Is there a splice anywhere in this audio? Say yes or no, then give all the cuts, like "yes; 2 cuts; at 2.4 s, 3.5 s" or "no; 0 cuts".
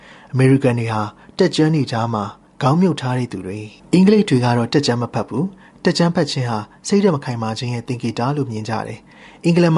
yes; 1 cut; at 3.8 s